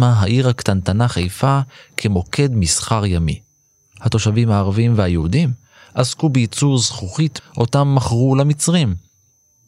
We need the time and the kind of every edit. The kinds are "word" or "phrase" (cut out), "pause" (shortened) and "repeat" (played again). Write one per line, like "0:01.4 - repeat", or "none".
0:07.4 - word